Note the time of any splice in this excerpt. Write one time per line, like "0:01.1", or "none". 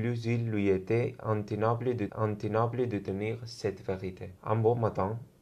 0:02.1
0:04.4